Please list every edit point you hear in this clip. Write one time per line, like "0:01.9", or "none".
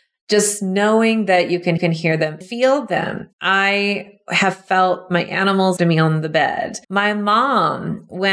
0:01.8
0:02.4
0:03.3
0:05.8
0:06.8